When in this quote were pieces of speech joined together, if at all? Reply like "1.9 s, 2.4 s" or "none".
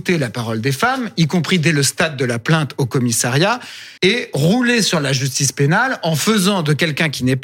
4.0 s